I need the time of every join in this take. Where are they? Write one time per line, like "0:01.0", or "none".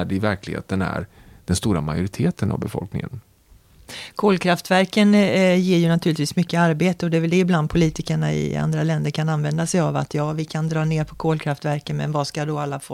none